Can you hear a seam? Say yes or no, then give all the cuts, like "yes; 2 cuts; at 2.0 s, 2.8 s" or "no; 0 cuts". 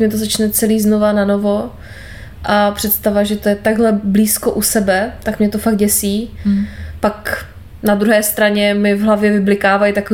no; 0 cuts